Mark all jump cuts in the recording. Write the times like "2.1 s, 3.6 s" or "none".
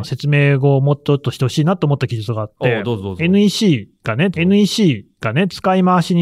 4.3 s